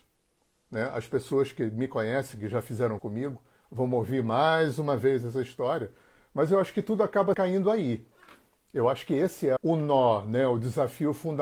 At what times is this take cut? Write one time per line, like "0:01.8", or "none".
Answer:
0:03.0
0:07.3
0:09.6